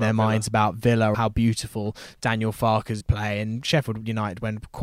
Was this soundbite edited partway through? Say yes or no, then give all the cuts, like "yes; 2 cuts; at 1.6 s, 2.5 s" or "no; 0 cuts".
yes; 2 cuts; at 1.1 s, 3.0 s